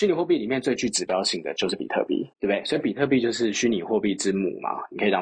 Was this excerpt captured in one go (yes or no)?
no